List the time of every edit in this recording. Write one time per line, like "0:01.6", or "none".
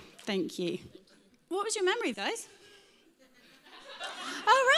0:02.1